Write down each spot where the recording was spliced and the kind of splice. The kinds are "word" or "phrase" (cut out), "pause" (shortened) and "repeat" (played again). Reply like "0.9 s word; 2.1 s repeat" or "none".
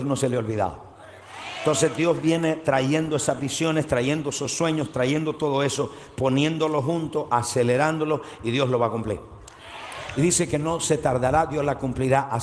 none